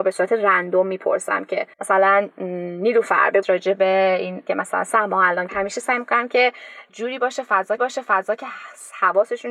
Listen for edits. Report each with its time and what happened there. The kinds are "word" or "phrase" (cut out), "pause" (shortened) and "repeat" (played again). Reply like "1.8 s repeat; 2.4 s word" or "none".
1.7 s pause; 3.4 s word; 4.5 s word; 5.5 s phrase; 6.9 s word; 7.8 s repeat